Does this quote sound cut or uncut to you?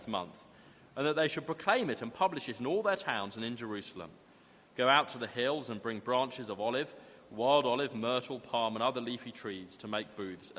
uncut